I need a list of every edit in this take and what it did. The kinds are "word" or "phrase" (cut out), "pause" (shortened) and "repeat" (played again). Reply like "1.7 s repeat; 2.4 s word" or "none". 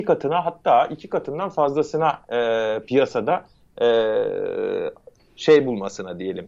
none

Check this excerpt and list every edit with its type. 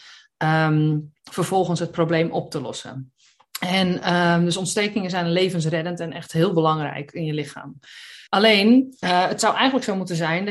8.3 s pause

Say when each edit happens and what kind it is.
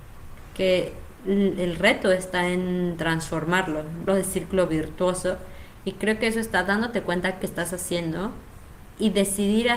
4.1 s word; 4.7 s phrase; 7.4 s phrase

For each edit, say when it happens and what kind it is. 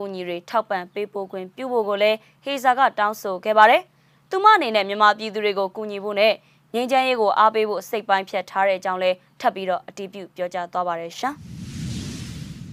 none

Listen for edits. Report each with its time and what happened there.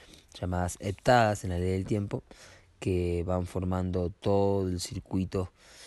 none

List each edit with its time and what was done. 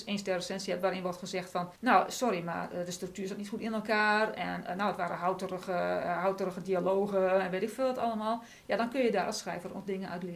1.8 s pause

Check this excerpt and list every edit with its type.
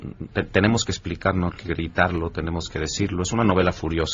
1.6 s phrase

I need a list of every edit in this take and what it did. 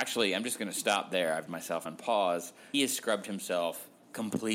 1.5 s word; 1.9 s word; 2.7 s phrase

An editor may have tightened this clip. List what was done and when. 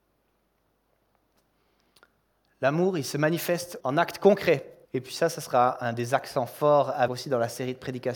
3.8 s word; 4.8 s pause; 7.1 s word

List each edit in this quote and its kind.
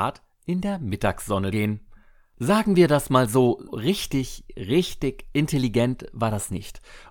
1.5 s word; 3.7 s word

